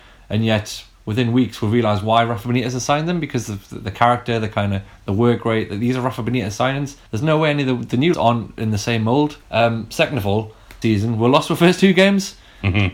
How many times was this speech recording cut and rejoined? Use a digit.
5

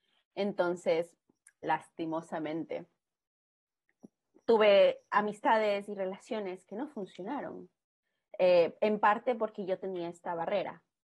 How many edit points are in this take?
0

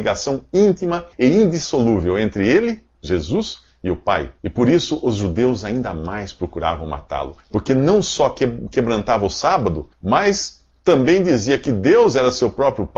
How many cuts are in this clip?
4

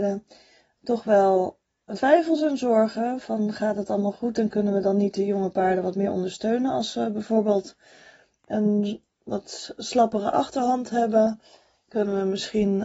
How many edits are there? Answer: 1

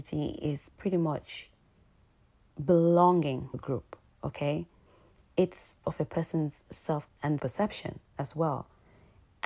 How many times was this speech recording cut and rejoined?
4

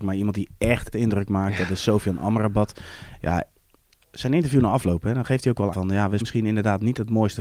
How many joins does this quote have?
4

